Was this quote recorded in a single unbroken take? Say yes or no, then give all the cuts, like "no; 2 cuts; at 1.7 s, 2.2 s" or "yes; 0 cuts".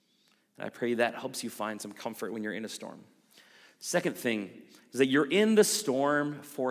yes; 0 cuts